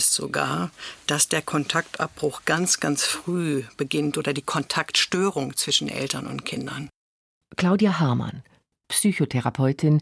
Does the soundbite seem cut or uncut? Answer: uncut